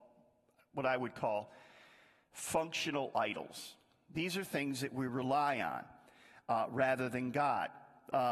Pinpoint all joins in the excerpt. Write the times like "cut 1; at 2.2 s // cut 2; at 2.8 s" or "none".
none